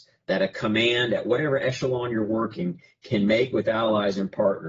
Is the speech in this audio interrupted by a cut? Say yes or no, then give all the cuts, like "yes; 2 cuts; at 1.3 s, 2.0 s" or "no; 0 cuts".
no; 0 cuts